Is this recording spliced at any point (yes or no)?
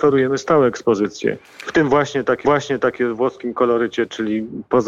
yes